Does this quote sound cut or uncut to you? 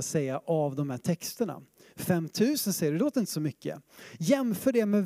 uncut